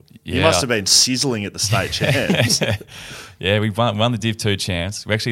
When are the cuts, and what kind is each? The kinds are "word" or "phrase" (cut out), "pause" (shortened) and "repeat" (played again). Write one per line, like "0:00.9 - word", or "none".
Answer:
none